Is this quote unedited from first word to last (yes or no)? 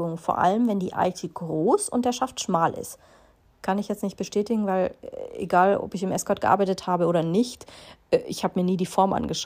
yes